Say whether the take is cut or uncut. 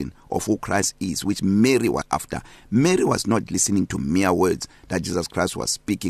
cut